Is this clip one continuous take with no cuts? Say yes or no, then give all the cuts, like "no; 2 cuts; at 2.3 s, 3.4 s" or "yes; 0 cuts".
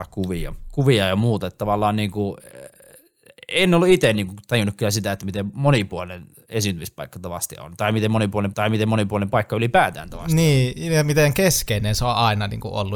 no; 1 cut; at 8.5 s